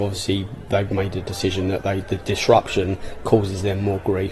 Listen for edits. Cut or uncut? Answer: uncut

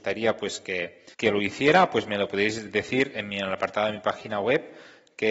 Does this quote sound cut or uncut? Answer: cut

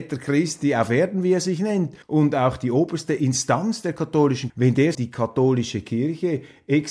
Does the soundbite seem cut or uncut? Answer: cut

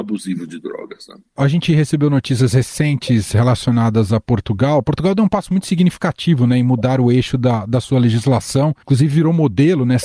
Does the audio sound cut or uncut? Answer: cut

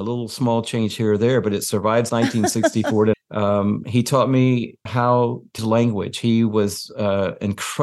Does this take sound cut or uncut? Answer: cut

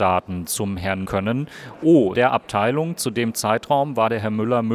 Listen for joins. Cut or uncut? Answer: cut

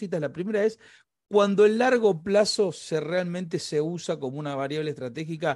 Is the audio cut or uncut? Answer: uncut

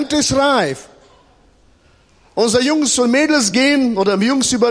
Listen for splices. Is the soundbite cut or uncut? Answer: uncut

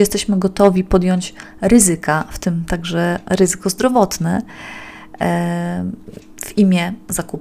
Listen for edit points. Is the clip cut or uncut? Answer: uncut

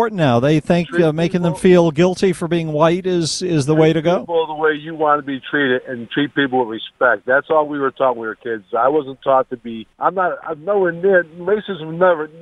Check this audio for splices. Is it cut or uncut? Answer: cut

